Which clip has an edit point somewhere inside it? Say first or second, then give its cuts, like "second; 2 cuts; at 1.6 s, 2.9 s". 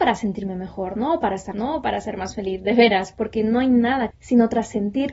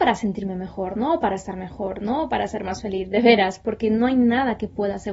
first; 2 cuts; at 1.5 s, 4.1 s